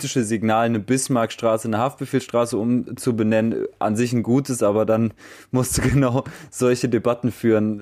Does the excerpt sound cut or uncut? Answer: uncut